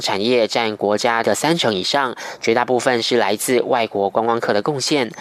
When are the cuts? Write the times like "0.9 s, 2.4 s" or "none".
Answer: 1.2 s